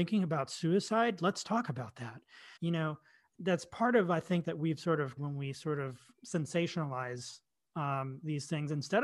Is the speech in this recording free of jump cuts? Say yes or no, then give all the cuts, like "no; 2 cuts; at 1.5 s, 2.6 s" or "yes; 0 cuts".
no; 4 cuts; at 2.6 s, 3.3 s, 4.4 s, 5.2 s